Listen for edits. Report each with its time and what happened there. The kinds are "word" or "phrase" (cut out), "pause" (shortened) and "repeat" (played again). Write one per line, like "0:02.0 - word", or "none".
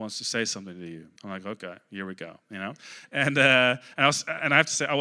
0:01.2 - pause